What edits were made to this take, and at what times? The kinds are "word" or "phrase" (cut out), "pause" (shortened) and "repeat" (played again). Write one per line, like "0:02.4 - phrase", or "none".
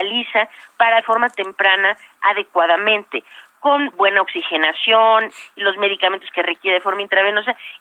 0:01.0 - phrase
0:03.9 - word